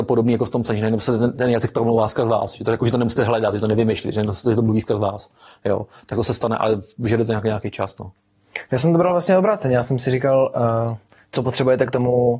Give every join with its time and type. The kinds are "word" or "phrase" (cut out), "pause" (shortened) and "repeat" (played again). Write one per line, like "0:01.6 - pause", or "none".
none